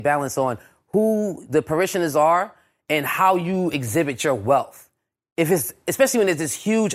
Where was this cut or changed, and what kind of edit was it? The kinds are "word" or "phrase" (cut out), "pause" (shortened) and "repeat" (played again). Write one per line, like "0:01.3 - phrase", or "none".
none